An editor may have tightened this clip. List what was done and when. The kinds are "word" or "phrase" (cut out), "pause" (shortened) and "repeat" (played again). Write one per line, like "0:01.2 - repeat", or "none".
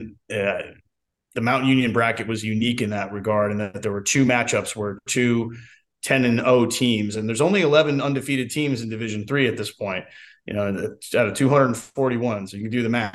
none